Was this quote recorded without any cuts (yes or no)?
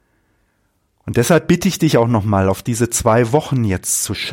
yes